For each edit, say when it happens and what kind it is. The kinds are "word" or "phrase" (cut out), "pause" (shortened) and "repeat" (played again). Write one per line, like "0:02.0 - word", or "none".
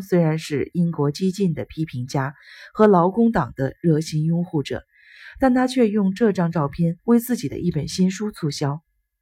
0:07.0 - pause